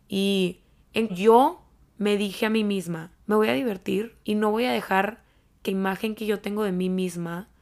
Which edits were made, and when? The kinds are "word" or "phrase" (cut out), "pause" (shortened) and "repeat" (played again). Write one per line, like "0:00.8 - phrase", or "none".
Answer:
0:01.1 - word
0:03.2 - pause
0:04.2 - pause
0:05.7 - word